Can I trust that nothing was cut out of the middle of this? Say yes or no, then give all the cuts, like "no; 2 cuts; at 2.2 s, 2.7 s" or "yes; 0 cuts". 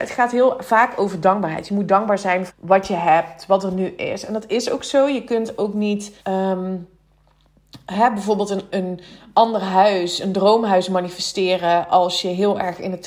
no; 3 cuts; at 2.5 s, 6.2 s, 8.7 s